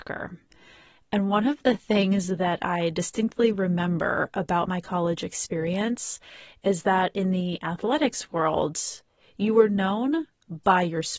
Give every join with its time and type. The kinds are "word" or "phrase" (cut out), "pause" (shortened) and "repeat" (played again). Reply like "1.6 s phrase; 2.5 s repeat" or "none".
none

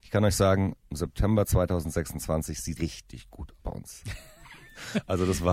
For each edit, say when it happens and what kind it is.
2.8 s word; 3.6 s word

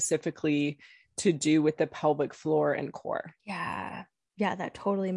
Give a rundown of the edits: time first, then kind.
3.4 s pause

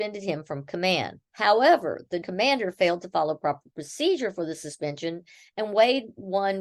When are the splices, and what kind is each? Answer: 1.3 s pause; 2.2 s word

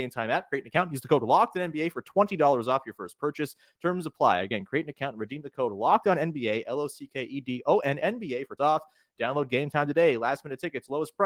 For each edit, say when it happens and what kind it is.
8.6 s phrase

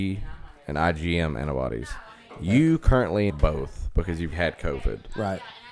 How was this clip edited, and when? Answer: 3.3 s phrase; 4.3 s word

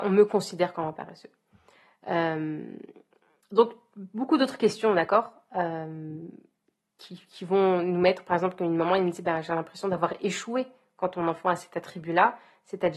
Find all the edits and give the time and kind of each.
none

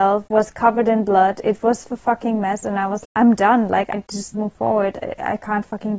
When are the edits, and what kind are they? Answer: 3.0 s word; 3.9 s word; 4.3 s phrase

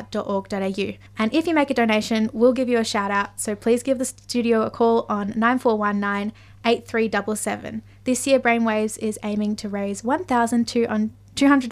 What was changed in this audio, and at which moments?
1.1 s pause

